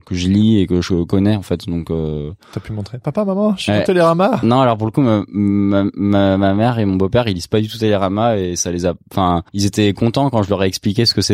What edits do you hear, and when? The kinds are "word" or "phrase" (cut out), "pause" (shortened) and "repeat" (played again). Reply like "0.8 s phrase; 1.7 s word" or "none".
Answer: 9.5 s pause